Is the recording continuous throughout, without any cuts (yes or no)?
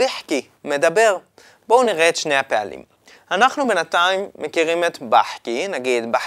yes